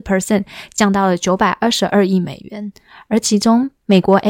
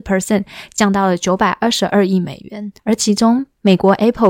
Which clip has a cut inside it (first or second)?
second